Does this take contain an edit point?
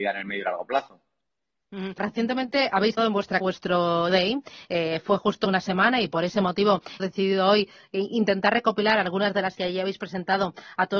yes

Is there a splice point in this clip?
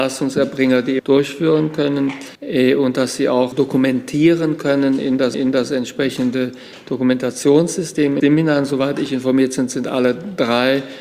yes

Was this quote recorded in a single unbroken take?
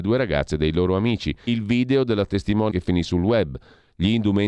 no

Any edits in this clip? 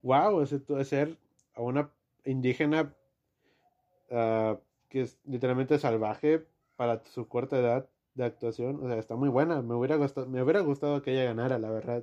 no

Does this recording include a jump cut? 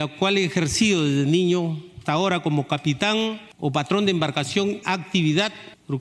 yes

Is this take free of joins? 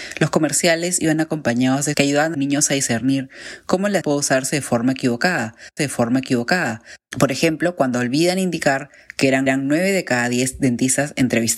no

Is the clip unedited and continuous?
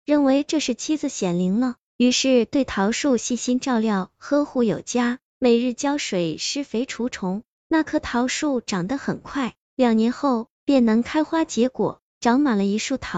no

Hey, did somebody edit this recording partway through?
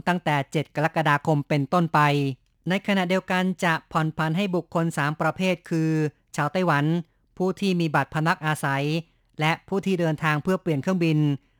no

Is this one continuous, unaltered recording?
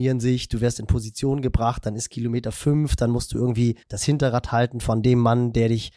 no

